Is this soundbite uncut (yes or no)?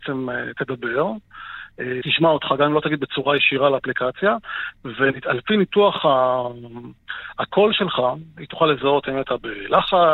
no